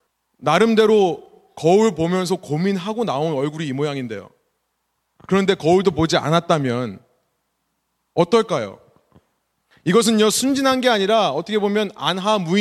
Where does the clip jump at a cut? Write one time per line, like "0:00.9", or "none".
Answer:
none